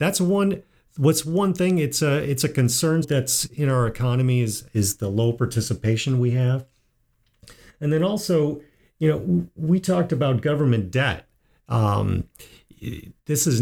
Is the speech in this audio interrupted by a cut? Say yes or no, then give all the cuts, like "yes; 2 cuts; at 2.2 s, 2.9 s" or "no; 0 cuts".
yes; 1 cut; at 3.0 s